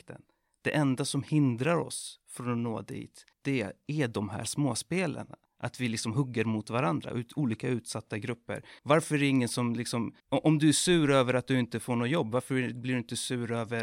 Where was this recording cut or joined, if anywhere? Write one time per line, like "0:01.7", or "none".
0:03.3
0:05.5
0:08.8
0:10.2

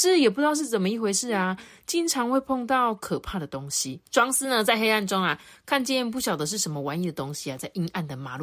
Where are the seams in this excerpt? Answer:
0:04.1

